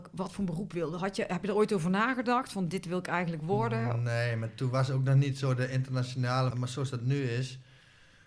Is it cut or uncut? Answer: cut